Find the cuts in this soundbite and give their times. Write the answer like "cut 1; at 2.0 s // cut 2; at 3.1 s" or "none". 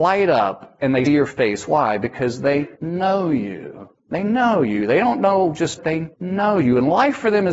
cut 1; at 1.1 s // cut 2; at 2.7 s // cut 3; at 4.0 s // cut 4; at 5.8 s // cut 5; at 6.1 s